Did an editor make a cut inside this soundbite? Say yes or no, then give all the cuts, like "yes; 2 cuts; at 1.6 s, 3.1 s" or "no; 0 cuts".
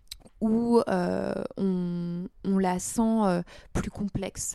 no; 0 cuts